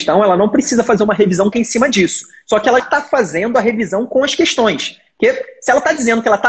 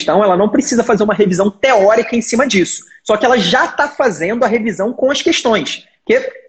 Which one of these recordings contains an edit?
first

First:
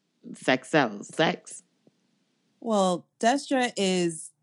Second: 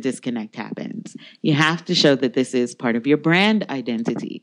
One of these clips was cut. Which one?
first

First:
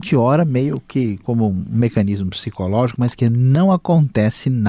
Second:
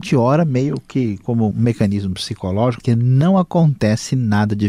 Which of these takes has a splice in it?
second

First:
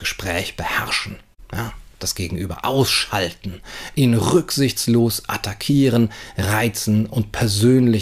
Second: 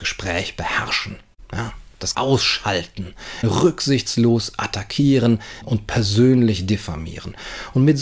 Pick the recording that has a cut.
second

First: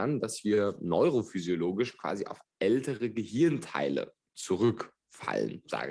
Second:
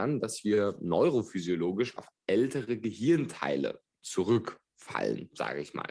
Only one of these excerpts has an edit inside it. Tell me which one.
second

